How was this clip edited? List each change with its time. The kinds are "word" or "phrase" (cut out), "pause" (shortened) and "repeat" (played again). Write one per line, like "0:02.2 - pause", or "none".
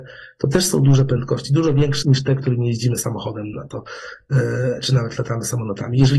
0:02.0 - word
0:03.5 - word